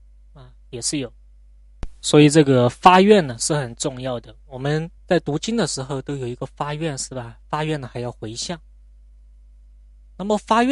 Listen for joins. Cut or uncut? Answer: cut